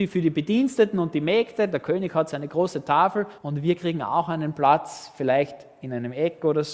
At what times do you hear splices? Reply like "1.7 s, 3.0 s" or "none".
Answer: 3.4 s